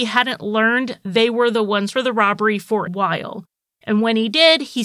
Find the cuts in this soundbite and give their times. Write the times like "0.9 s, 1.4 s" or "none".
1.9 s, 2.9 s